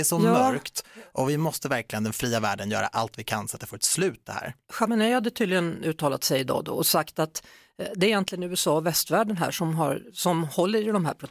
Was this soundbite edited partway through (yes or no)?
no